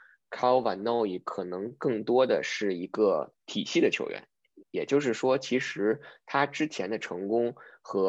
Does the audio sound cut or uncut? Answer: cut